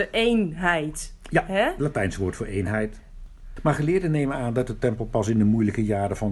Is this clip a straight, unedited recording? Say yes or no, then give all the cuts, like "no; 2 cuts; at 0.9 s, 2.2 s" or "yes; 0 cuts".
yes; 0 cuts